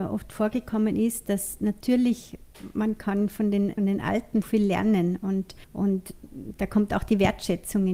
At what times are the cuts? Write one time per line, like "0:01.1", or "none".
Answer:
0:03.8
0:04.4
0:05.6